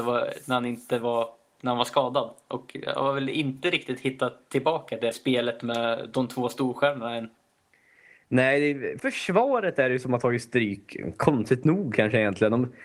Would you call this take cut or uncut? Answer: cut